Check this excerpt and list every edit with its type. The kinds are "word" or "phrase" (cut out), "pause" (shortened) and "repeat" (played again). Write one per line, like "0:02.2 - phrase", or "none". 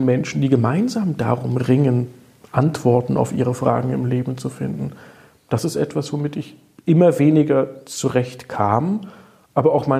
none